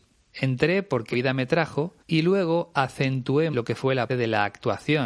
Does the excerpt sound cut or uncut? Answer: cut